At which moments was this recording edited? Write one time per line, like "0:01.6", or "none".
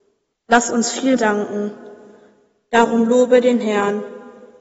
0:01.2